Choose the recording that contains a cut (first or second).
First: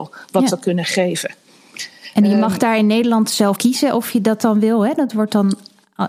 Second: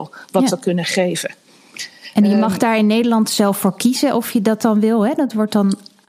first